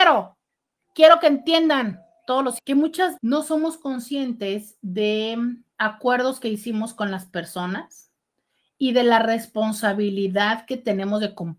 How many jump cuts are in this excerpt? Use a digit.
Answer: 3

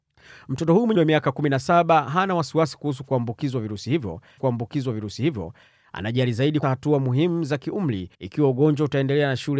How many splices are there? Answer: 4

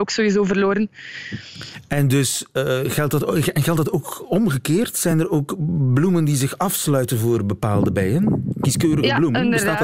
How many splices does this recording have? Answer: 0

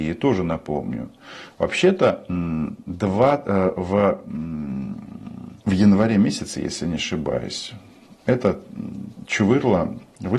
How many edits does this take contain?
1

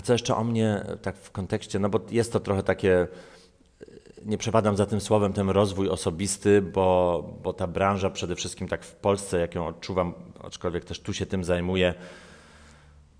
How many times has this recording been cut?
0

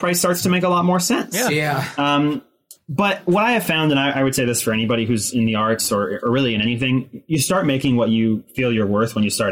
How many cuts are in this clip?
0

